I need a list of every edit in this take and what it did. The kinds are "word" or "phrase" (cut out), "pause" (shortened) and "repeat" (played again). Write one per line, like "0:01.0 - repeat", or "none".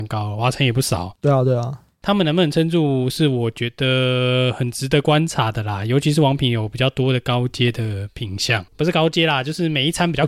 0:08.7 - word

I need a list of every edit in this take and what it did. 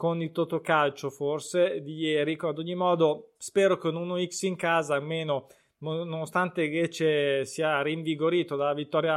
0:03.4 - pause

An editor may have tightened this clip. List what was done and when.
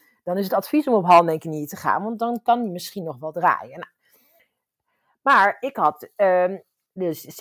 none

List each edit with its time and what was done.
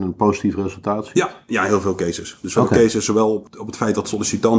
none

